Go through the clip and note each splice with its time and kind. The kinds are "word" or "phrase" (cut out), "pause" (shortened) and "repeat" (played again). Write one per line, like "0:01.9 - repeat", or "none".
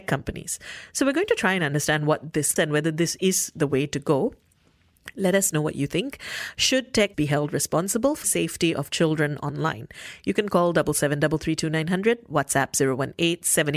0:02.6 - word
0:07.1 - word
0:08.2 - word

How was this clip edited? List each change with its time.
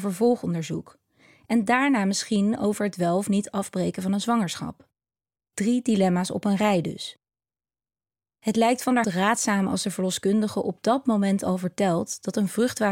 0:09.0 - word

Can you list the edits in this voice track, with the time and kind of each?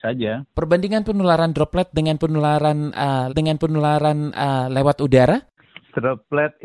0:03.3 - repeat

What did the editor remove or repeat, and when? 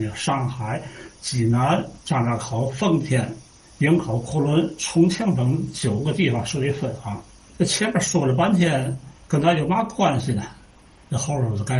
0:02.0 - pause
0:07.4 - pause

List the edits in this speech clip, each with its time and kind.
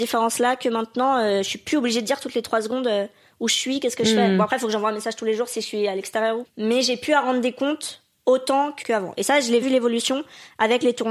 0:06.4 - phrase
0:08.8 - word
0:09.6 - word

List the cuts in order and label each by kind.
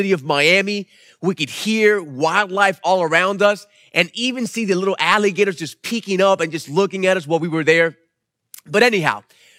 none

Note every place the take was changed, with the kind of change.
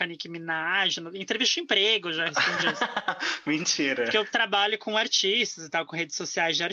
none

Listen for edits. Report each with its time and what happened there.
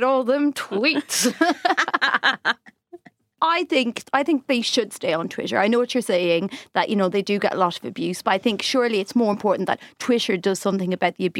none

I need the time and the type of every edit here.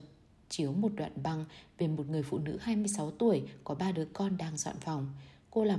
none

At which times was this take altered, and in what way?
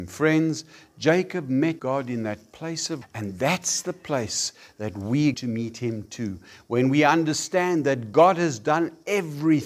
0:01.8 - word
0:03.0 - word
0:05.3 - word

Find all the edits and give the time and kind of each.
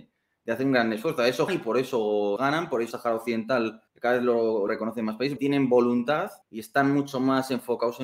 0:01.5 - word
0:02.4 - word
0:02.9 - word
0:03.9 - pause
0:04.7 - word
0:05.4 - word
0:06.4 - pause

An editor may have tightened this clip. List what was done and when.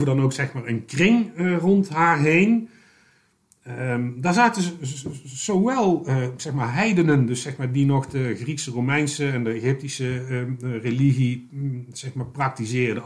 none

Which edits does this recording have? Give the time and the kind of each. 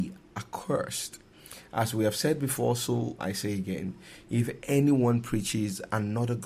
0:03.2 - word

